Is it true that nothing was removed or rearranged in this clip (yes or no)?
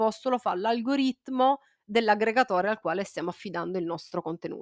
yes